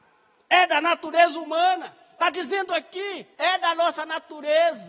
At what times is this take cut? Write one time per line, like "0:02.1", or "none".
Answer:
0:03.3